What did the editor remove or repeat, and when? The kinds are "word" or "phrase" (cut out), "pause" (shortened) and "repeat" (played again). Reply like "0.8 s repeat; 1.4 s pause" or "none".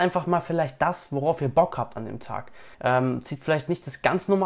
2.7 s pause